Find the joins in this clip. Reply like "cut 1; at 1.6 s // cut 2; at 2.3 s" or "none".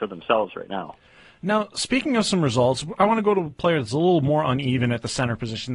none

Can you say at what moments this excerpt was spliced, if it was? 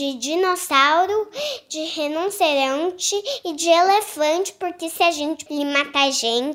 cut 1; at 5.5 s

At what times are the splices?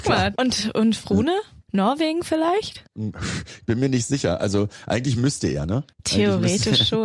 cut 1; at 1.6 s // cut 2; at 5.9 s

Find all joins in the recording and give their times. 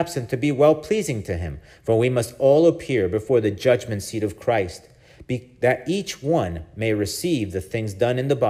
none

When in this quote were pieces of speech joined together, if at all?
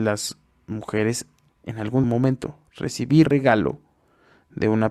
cut 1; at 1.5 s // cut 2; at 2.0 s // cut 3; at 3.2 s

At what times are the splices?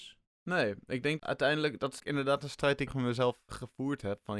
cut 1; at 1.2 s // cut 2; at 2.0 s // cut 3; at 2.9 s // cut 4; at 3.5 s

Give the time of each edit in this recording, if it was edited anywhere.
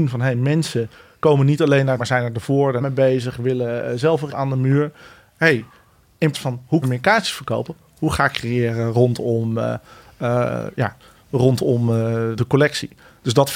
cut 1; at 2.0 s // cut 2; at 2.8 s // cut 3; at 4.3 s // cut 4; at 6.3 s // cut 5; at 6.8 s // cut 6; at 8.3 s // cut 7; at 12.4 s

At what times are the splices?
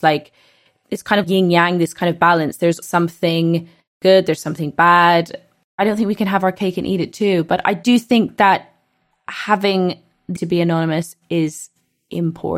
cut 1; at 1.2 s // cut 2; at 2.8 s // cut 3; at 10.4 s

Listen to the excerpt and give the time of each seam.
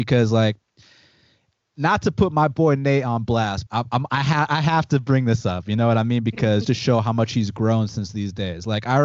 cut 1; at 3.7 s // cut 2; at 6.6 s

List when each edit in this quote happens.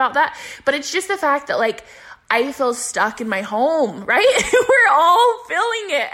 none

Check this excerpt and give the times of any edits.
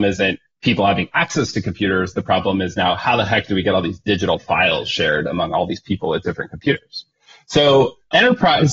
none

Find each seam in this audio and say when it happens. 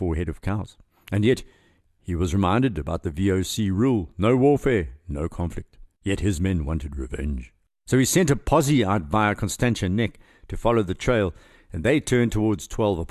none

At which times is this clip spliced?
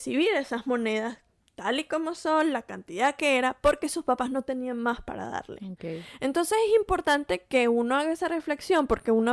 none

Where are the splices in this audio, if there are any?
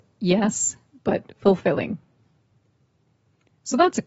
none

